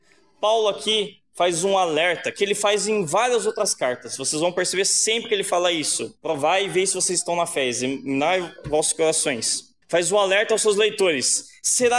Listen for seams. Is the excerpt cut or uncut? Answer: cut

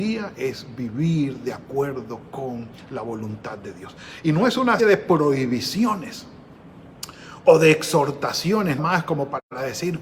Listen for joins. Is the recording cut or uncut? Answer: cut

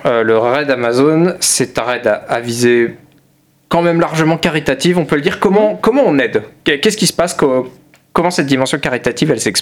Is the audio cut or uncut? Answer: uncut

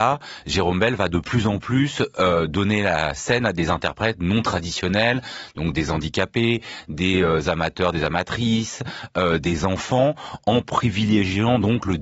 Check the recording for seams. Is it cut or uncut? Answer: uncut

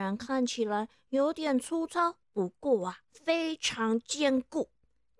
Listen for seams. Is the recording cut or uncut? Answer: cut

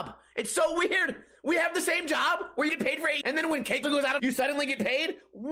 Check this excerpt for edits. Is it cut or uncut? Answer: cut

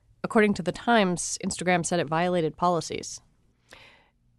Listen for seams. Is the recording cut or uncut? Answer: uncut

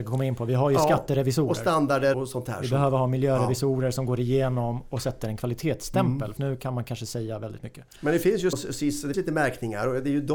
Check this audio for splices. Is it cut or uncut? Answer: cut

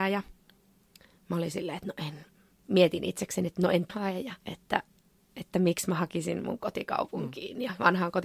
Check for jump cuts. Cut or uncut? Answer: cut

